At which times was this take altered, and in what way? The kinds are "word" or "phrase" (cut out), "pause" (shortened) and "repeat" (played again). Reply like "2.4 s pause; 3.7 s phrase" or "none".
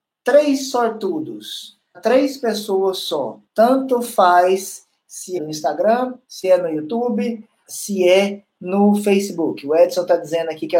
1.9 s word; 3.4 s pause; 5.4 s word; 6.2 s pause; 7.7 s word

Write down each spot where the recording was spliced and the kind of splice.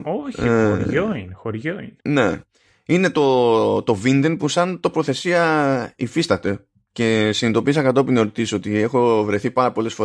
2.0 s pause

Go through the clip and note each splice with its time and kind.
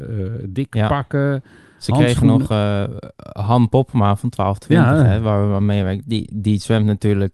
none

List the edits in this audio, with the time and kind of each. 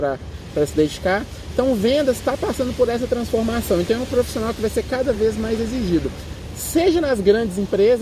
none

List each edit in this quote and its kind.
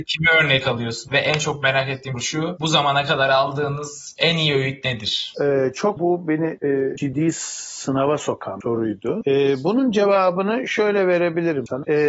2.1 s word; 7.0 s word

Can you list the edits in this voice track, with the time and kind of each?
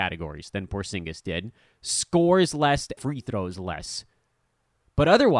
3.0 s word

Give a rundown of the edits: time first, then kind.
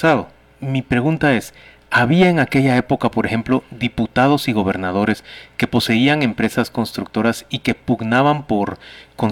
none

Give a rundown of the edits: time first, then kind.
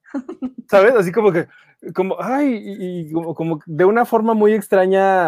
none

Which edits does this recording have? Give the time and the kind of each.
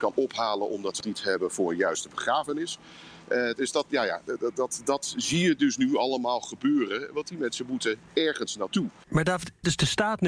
1.0 s word

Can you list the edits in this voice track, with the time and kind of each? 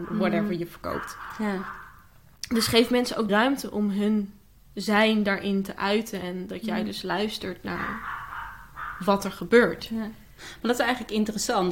3.3 s word

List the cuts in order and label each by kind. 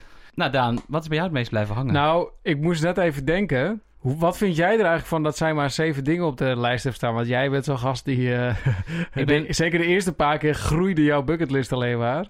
none

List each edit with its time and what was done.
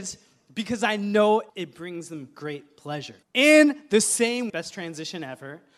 1.5 s pause; 3.2 s pause; 4.5 s word

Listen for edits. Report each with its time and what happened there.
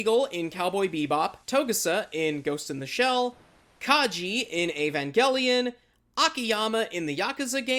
1.4 s pause

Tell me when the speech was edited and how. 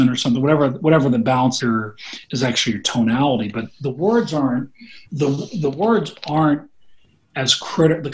1.6 s phrase; 5.1 s pause

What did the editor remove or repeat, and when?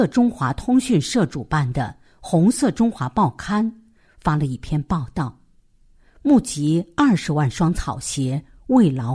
none

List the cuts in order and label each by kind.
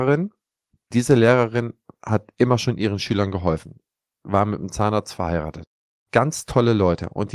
none

